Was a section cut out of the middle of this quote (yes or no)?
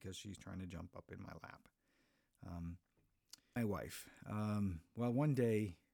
yes